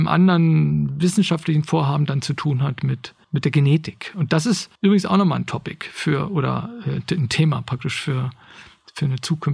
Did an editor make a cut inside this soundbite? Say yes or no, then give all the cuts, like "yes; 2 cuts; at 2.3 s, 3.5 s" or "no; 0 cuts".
yes; 2 cuts; at 3.2 s, 4.8 s